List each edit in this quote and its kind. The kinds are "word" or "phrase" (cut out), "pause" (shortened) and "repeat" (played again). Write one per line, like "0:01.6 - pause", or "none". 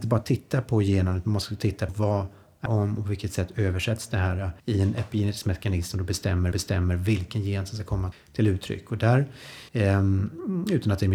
0:01.9 - word
0:02.7 - phrase
0:04.6 - pause
0:06.5 - repeat
0:08.1 - word
0:09.7 - pause